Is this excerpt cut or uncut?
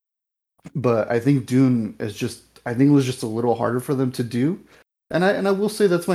uncut